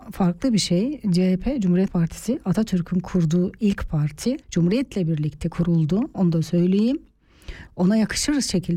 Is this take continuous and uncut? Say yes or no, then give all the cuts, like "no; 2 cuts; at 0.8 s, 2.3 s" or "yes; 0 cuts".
no; 3 cuts; at 1.9 s, 4.4 s, 7.7 s